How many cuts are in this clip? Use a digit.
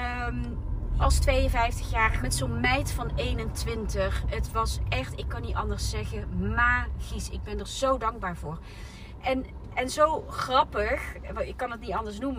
2